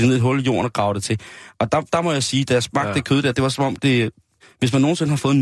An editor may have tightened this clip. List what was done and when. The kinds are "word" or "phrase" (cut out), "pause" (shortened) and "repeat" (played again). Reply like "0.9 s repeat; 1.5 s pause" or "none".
none